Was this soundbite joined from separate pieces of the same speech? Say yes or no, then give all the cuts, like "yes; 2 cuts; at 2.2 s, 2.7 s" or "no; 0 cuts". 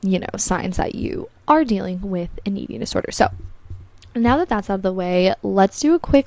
no; 0 cuts